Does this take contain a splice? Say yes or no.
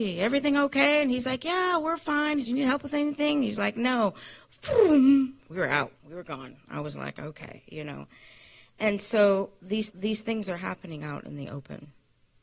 yes